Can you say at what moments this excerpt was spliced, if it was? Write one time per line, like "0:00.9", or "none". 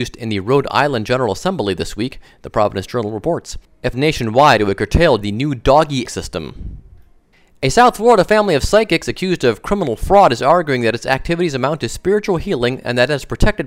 0:03.9
0:05.2
0:06.0
0:07.3